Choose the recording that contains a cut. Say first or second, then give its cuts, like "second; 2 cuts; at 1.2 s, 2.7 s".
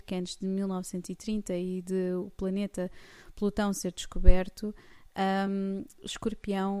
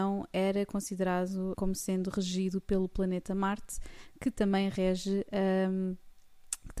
second; 1 cut; at 1.5 s